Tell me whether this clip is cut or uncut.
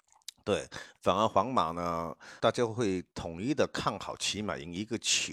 cut